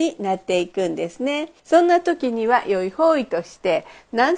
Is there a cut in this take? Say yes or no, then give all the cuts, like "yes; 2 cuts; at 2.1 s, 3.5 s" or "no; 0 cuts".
yes; 1 cut; at 1.6 s